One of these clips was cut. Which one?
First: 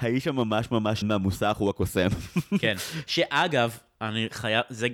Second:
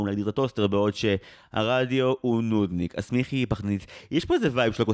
first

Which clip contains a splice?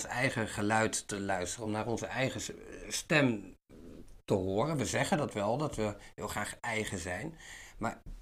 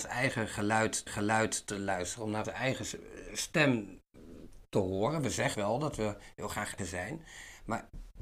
second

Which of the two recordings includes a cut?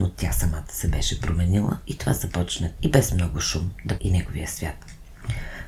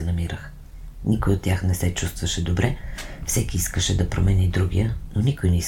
first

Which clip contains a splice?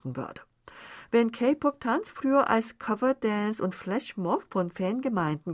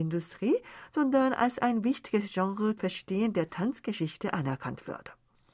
second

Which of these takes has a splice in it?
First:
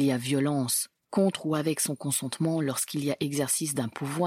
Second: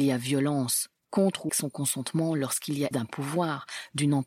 second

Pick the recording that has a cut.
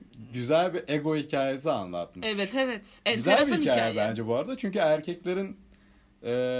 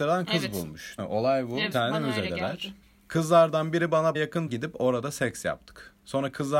second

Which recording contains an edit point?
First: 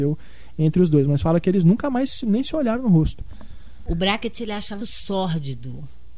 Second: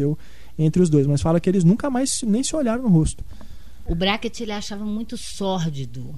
first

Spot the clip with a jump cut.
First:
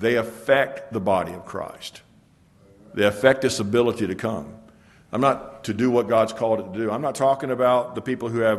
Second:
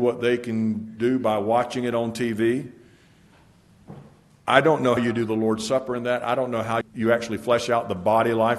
second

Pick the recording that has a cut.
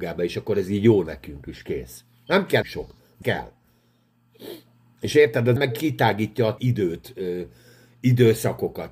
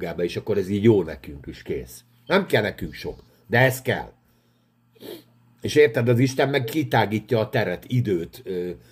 first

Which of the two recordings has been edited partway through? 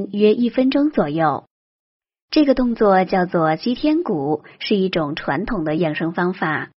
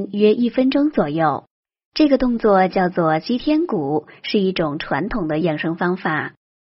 second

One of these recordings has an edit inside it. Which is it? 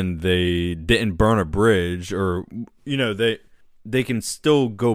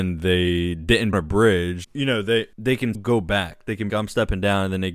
second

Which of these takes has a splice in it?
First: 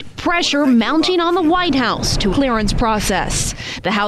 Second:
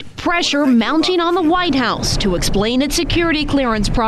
first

